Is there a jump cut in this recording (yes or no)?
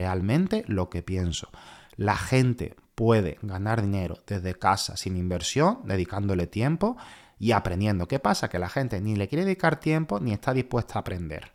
no